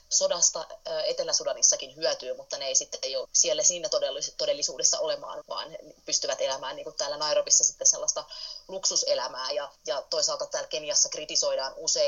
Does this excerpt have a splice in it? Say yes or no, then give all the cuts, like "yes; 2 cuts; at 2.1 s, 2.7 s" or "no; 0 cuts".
yes; 4 cuts; at 3.2 s, 5.4 s, 9.8 s, 10.5 s